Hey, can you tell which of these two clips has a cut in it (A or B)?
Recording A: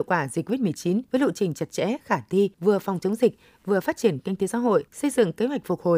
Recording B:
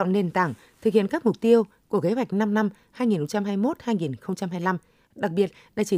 A